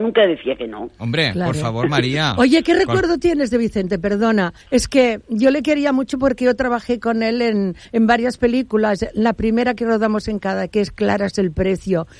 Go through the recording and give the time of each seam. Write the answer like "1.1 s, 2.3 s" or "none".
4.6 s, 7.8 s